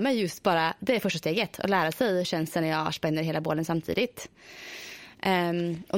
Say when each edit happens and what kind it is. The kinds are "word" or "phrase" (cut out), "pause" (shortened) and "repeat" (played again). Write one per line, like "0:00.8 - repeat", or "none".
0:02.2 - word